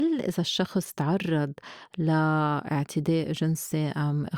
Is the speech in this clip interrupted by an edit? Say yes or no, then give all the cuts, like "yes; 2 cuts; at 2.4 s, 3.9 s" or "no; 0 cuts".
no; 0 cuts